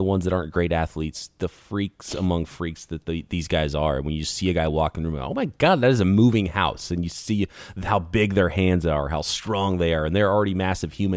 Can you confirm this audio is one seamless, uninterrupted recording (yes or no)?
yes